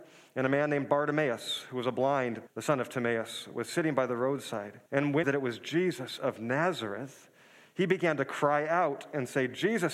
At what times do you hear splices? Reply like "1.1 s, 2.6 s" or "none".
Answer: 2.5 s, 4.9 s, 5.2 s